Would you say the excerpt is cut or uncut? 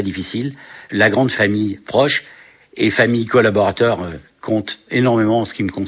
uncut